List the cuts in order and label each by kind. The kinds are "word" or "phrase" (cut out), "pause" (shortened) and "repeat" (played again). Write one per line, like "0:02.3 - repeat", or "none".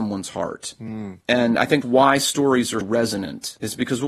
0:01.8 - word
0:02.8 - word

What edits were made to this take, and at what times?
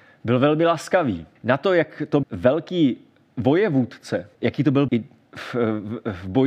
0:01.4 - pause
0:02.2 - word
0:04.3 - pause
0:04.9 - word

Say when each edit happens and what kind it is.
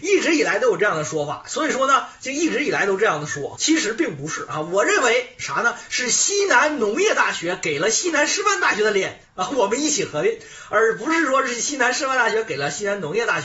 0:03.6 - word

